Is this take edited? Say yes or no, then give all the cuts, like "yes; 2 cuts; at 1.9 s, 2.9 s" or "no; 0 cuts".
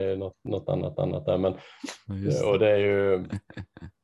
yes; 1 cut; at 0.9 s